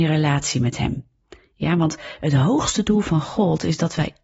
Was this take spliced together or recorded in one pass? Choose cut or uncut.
uncut